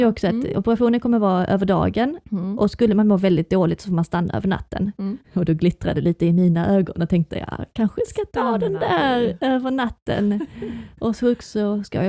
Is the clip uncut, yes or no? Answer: no